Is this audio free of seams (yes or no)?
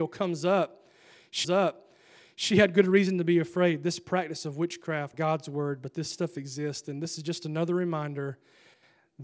no